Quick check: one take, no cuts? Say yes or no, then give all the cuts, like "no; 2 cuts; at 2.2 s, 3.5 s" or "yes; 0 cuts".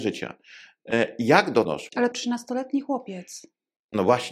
no; 2 cuts; at 1.6 s, 2.1 s